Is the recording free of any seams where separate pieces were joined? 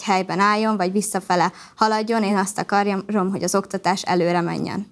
yes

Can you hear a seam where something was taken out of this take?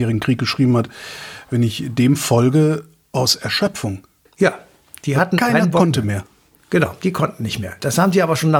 no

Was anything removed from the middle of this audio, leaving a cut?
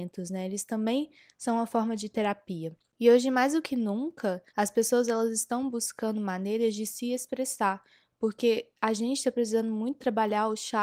yes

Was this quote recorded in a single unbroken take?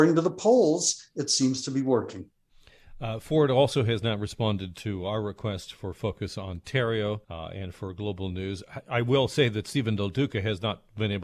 no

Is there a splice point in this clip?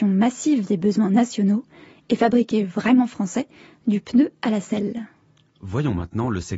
no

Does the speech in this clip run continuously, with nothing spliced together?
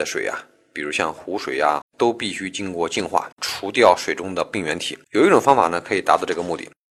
no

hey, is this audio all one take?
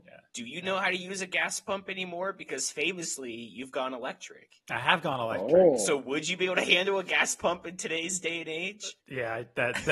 no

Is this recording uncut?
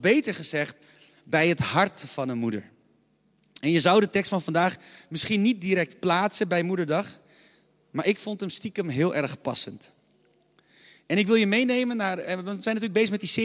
yes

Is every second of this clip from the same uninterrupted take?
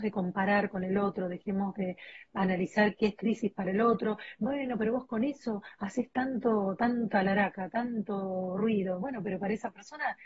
yes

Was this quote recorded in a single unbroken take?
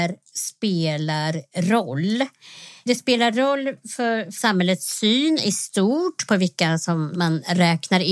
yes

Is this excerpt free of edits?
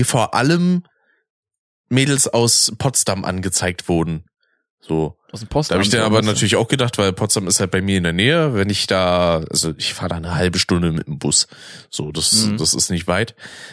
yes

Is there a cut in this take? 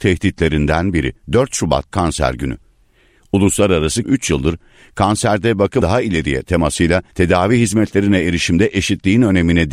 yes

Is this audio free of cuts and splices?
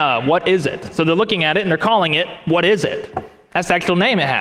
yes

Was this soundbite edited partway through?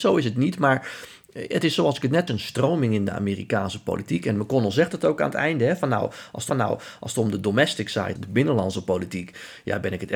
yes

